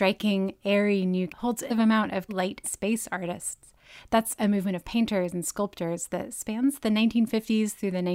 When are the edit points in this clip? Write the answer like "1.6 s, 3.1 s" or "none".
1.3 s, 1.7 s, 2.3 s, 2.6 s